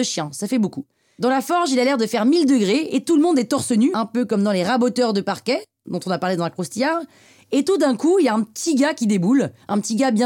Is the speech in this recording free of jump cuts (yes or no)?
yes